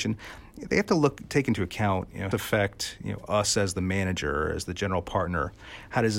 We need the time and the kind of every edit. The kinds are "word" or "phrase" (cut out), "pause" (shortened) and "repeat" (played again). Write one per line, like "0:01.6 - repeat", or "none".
0:02.3 - phrase